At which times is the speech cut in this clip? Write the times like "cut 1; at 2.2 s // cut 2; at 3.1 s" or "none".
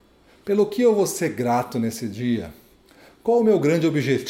none